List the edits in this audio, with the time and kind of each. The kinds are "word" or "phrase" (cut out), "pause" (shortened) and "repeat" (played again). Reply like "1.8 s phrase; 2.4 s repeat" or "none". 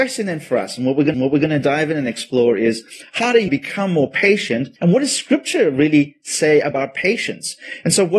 1.1 s repeat; 3.5 s phrase; 4.8 s pause